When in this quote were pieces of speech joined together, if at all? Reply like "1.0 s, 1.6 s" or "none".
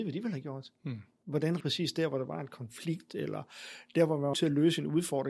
1.6 s, 4.3 s